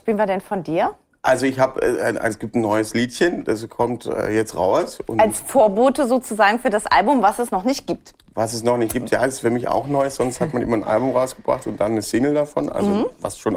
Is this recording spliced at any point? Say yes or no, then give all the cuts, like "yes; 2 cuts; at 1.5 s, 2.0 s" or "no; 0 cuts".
no; 0 cuts